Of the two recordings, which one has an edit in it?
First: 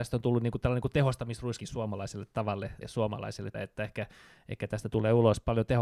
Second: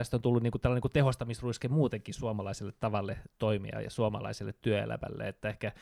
first; 3 cuts; at 1.6 s, 2.8 s, 3.5 s

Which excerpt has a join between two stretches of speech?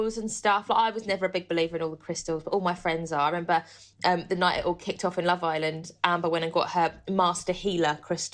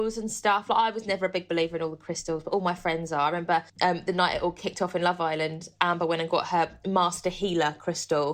second; 1 cut; at 3.7 s

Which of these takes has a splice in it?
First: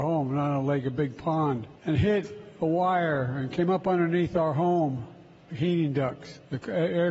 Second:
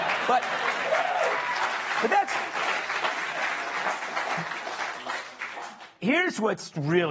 first; 1 cut; at 5.5 s

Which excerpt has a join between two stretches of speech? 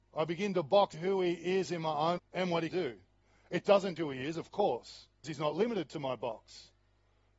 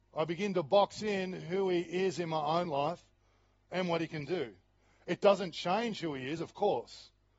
first; 5 cuts; at 0.9 s, 2.2 s, 2.7 s, 4.0 s, 5.2 s

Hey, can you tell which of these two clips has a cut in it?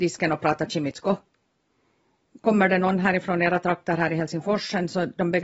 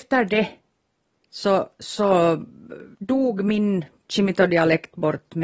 second; 1 cut; at 2.9 s

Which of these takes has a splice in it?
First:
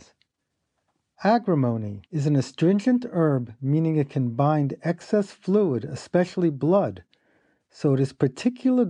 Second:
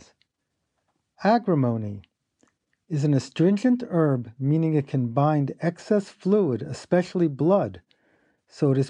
first; 1 cut; at 2.1 s

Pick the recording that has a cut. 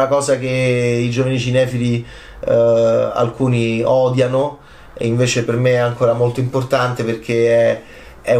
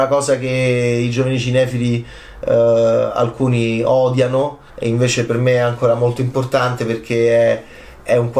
second; 1 cut; at 4.7 s

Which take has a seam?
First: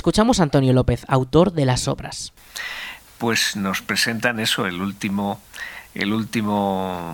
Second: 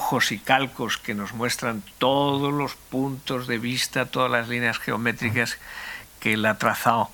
second; 1 cut; at 1.9 s

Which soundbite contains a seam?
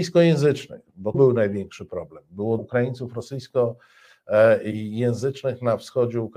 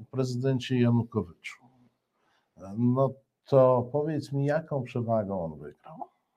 first; 2 cuts; at 1.1 s, 2.6 s

